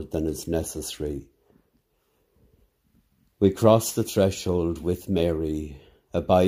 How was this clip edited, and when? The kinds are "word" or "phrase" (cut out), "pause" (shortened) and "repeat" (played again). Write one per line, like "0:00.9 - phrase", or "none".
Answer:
none